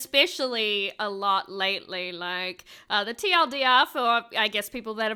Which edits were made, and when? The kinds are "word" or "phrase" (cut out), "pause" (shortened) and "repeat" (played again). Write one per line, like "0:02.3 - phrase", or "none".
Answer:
none